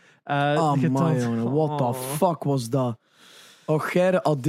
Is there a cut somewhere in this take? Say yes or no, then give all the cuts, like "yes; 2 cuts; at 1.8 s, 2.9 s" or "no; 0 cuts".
no; 0 cuts